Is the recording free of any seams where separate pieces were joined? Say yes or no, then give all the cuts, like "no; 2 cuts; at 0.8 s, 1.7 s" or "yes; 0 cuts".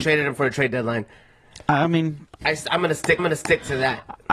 no; 2 cuts; at 2.4 s, 3.2 s